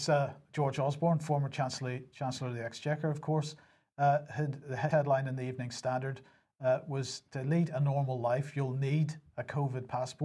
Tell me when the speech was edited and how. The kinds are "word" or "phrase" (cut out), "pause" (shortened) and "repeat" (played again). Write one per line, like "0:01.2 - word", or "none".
0:04.9 - word